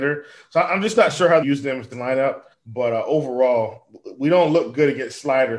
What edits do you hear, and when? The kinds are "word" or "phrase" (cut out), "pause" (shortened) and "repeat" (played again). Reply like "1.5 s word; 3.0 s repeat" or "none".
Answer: 1.4 s phrase; 1.9 s phrase; 2.5 s pause